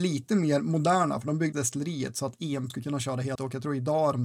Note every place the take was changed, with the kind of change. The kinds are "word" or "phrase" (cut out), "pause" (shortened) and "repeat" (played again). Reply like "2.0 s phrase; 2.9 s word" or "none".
1.5 s word; 2.7 s word; 3.4 s word